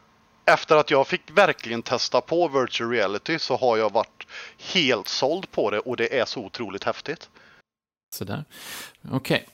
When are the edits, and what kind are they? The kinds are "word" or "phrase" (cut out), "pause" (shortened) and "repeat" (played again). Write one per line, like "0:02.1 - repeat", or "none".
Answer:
0:07.6 - pause